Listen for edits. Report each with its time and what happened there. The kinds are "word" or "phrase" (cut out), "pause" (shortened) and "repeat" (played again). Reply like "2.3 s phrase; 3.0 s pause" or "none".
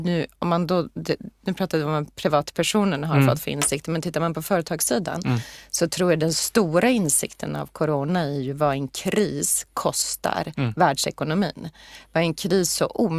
none